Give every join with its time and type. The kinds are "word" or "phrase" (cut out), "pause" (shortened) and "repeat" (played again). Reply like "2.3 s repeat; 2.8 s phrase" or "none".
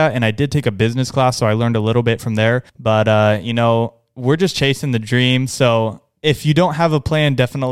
2.7 s pause